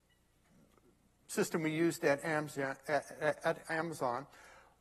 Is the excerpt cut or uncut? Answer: uncut